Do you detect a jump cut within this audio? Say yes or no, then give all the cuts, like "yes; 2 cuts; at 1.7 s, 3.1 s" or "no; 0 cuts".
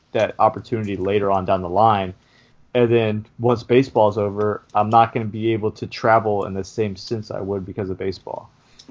no; 0 cuts